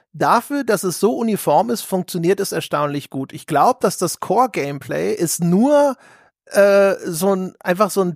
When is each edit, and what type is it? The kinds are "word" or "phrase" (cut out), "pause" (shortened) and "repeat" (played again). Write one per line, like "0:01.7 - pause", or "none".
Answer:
none